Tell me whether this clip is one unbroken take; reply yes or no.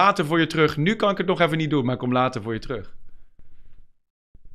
yes